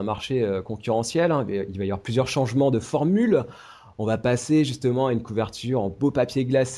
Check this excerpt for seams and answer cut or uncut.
uncut